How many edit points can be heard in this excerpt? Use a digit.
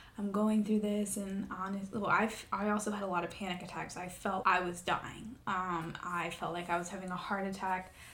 2